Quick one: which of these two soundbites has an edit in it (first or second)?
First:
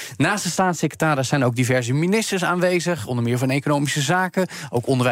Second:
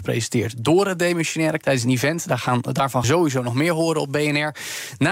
second